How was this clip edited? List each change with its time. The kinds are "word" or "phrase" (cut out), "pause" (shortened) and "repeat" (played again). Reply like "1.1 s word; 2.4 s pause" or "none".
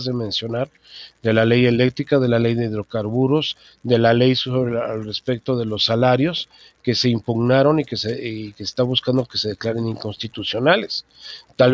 none